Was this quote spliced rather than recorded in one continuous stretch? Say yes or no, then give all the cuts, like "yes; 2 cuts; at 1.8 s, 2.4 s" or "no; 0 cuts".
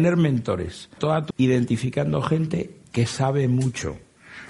yes; 2 cuts; at 1.0 s, 1.3 s